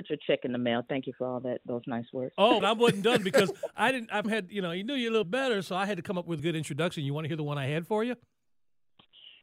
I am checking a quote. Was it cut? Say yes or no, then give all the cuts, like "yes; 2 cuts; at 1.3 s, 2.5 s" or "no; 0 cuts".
yes; 4 cuts; at 2.6 s, 4.2 s, 5.2 s, 6.4 s